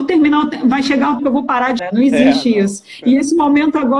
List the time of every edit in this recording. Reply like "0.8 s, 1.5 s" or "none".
1.2 s, 1.8 s